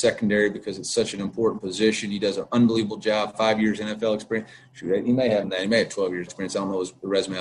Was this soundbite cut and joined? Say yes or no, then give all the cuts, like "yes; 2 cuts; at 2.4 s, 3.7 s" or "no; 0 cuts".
yes; 2 cuts; at 5.4 s, 6.3 s